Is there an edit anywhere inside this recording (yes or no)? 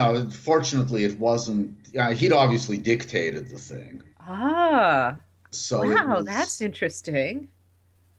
yes